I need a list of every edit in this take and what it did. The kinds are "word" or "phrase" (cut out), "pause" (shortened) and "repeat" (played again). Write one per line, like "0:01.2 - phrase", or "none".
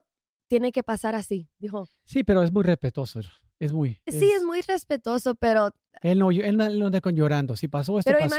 none